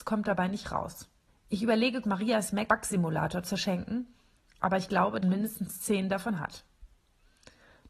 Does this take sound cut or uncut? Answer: cut